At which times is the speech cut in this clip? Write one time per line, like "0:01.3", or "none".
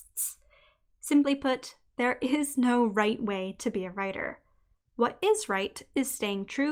none